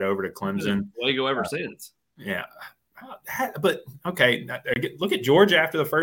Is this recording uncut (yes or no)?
yes